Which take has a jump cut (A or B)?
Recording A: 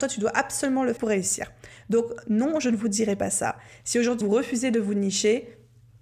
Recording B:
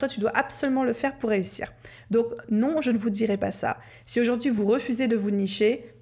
A